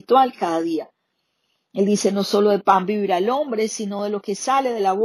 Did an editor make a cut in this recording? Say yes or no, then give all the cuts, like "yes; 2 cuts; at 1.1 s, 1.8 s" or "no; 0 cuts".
no; 0 cuts